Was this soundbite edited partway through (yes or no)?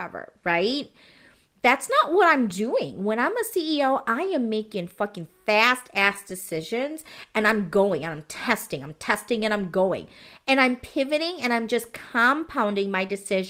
no